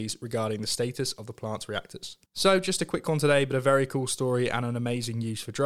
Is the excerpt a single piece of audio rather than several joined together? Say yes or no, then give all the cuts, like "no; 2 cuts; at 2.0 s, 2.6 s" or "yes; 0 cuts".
no; 1 cut; at 2.3 s